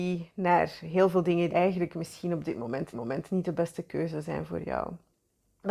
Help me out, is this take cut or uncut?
cut